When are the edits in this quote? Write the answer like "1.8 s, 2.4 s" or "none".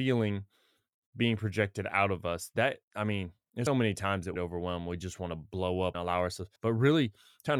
3.7 s, 4.4 s, 5.9 s, 6.6 s